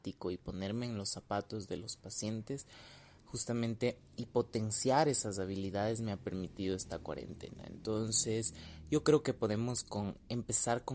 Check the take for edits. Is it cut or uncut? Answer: cut